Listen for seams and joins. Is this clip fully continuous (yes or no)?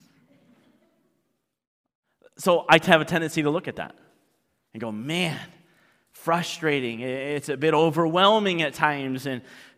yes